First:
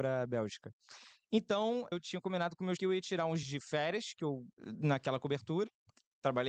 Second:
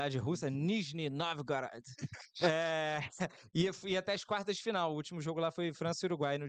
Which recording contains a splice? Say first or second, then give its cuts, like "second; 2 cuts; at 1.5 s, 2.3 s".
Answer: first; 4 cuts; at 1.9 s, 2.8 s, 3.4 s, 4.5 s